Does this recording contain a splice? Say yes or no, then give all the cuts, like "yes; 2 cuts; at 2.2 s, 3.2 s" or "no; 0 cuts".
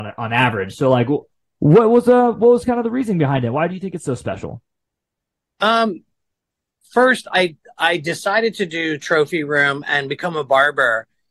no; 0 cuts